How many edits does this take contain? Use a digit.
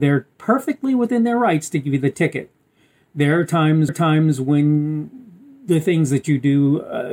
1